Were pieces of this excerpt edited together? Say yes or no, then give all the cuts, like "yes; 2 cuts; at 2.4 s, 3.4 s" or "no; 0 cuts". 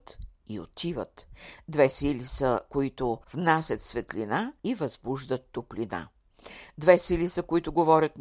yes; 2 cuts; at 3.2 s, 4.6 s